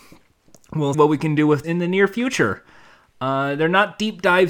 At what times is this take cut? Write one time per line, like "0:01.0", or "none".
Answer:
0:00.9
0:01.6